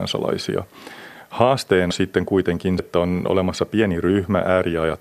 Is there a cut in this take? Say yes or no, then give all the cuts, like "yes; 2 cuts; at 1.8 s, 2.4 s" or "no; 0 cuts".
yes; 2 cuts; at 1.9 s, 2.8 s